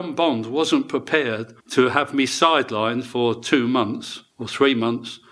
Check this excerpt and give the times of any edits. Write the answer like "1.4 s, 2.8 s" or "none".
1.6 s, 4.3 s